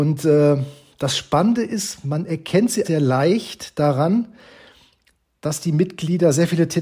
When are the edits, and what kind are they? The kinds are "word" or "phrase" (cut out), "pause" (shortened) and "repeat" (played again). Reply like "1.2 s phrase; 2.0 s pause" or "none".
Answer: 2.8 s word